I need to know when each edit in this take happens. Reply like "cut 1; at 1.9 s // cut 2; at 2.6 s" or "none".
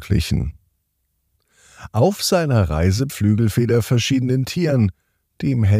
cut 1; at 3.1 s